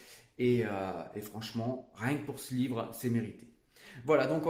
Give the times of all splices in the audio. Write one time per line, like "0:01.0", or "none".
none

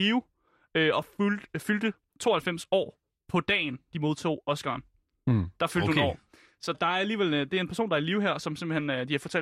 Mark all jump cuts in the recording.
0:06.7

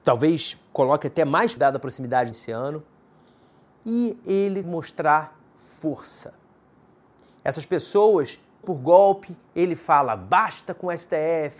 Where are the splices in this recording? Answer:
0:01.6
0:02.3
0:04.6
0:08.6

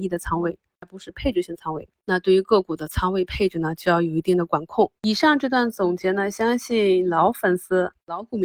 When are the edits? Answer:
0:05.0

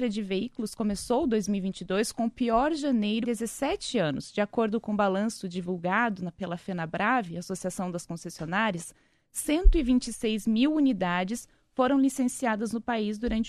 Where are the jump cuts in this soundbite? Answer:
0:03.2

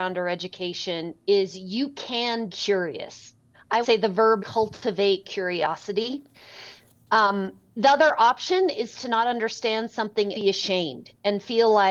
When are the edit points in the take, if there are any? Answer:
0:02.5
0:03.8
0:04.4
0:10.3

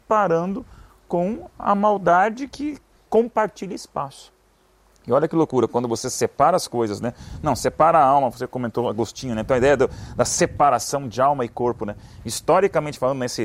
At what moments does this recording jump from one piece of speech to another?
none

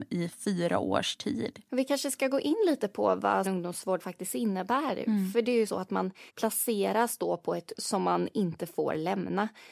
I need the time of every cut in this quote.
0:01.6
0:03.4
0:05.7
0:06.3
0:07.7

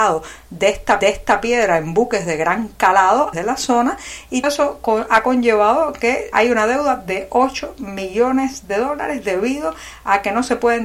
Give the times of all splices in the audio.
0:01.0
0:03.3
0:04.4
0:06.3

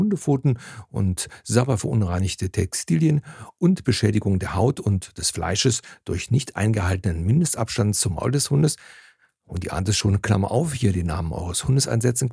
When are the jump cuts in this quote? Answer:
none

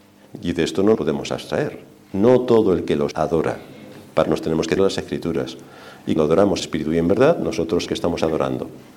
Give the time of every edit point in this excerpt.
0:00.9
0:03.1
0:04.2
0:04.8
0:06.2
0:06.6
0:07.9

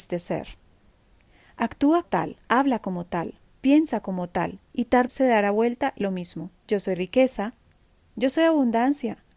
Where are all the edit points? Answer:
0:02.0
0:02.4
0:03.4
0:04.6
0:05.1
0:06.0
0:06.6

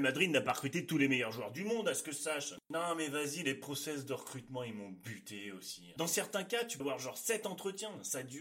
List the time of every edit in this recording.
0:02.6
0:06.8

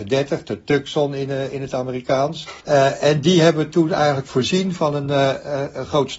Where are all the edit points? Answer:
0:02.6

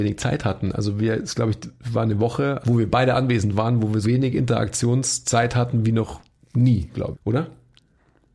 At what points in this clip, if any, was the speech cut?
0:02.6
0:04.0
0:07.1

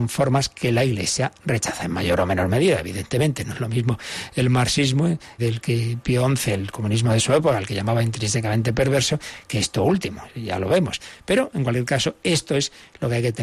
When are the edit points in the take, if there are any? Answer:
0:05.4

